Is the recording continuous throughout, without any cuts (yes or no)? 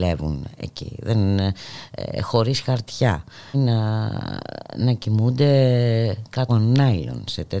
no